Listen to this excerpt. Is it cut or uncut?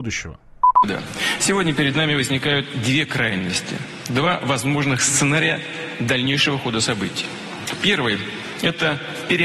uncut